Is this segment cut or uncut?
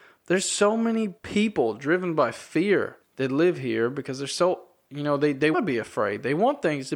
cut